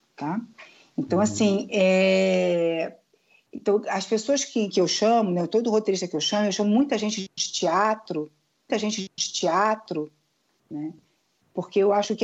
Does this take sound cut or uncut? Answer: cut